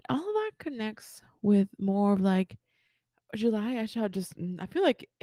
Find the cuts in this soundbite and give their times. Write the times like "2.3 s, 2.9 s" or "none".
none